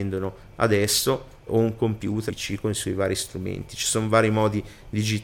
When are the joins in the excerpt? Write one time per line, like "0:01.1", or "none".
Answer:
0:01.5
0:02.3